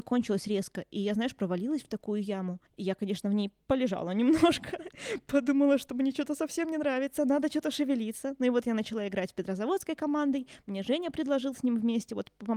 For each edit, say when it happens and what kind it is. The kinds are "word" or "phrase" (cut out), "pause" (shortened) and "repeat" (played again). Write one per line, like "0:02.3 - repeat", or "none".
0:02.7 - pause
0:03.6 - pause